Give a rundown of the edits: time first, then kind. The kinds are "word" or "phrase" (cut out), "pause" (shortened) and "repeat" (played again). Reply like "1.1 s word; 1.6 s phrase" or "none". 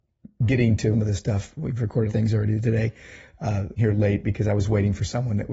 0.9 s phrase; 2.1 s phrase; 3.8 s word

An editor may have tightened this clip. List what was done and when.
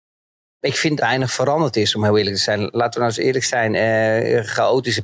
1.0 s phrase

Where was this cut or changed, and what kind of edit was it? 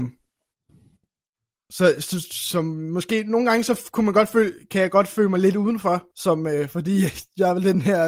6.1 s pause

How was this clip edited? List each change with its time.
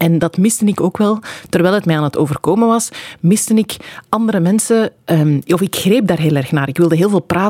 none

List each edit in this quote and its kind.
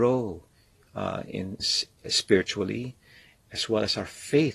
1.6 s word

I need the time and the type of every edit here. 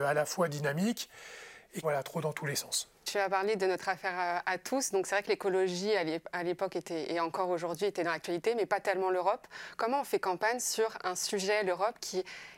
1.8 s phrase

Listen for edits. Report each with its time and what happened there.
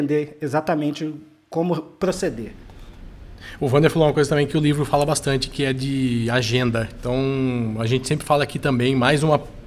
none

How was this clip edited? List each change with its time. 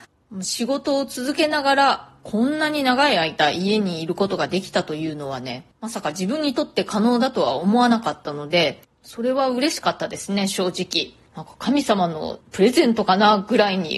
5.7 s pause; 8.9 s pause; 11.3 s pause; 12.4 s pause

